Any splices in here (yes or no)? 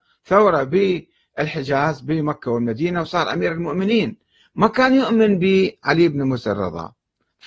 no